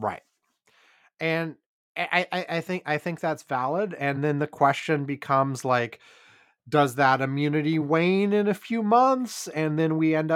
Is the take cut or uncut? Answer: uncut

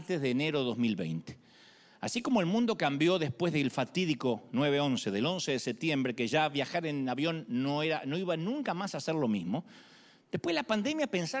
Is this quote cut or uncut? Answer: uncut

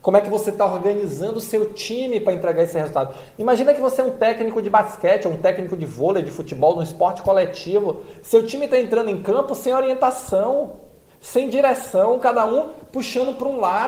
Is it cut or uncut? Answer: uncut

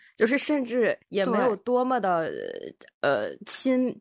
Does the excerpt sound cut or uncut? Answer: cut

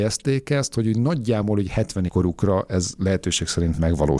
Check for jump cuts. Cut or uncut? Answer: cut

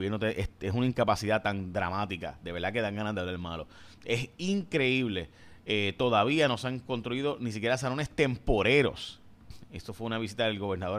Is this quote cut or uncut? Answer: uncut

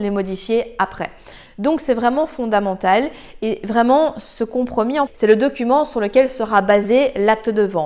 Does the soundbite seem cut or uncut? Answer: cut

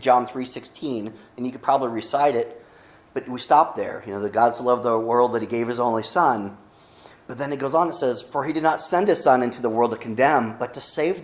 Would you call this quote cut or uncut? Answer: uncut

